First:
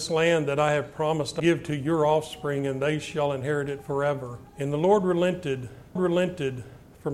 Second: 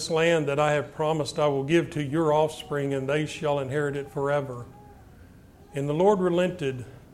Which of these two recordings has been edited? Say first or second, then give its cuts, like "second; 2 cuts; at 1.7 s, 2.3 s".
first; 3 cuts; at 1.4 s, 4.5 s, 6.0 s